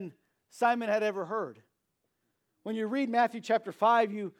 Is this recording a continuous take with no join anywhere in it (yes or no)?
yes